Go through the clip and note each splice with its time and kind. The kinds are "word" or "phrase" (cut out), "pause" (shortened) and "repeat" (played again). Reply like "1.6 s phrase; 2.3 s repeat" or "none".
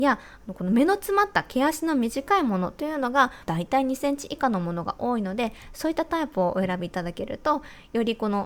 3.5 s phrase